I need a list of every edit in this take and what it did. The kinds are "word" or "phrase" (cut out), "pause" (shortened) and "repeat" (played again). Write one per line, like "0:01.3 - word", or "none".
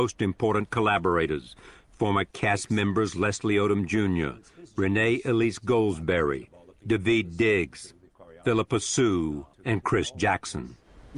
0:09.5 - pause